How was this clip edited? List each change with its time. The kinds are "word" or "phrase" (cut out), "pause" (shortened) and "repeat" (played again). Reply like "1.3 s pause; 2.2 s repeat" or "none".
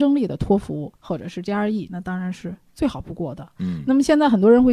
1.0 s pause; 1.9 s phrase